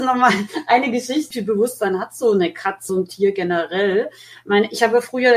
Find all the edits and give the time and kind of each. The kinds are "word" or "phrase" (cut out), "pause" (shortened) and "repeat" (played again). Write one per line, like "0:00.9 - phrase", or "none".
0:01.3 - phrase
0:02.9 - phrase